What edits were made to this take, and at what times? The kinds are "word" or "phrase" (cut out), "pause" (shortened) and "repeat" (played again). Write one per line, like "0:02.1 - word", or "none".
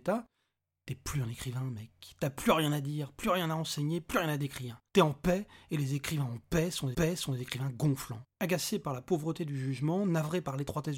0:04.9 - pause
0:06.9 - repeat
0:08.3 - pause